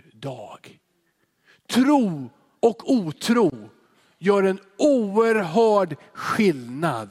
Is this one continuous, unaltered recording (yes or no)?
yes